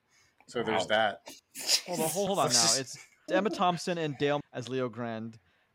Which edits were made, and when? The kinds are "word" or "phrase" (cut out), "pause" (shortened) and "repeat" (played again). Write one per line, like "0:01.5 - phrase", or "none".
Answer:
0:02.3 - word
0:03.3 - word
0:04.4 - word